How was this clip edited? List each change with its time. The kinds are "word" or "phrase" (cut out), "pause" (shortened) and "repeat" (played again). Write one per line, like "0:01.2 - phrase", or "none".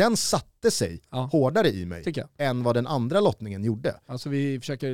none